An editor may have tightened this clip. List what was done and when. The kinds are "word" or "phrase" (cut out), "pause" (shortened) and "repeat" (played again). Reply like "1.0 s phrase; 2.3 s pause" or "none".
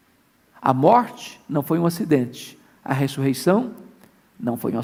none